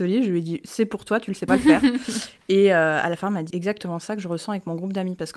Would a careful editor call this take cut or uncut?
cut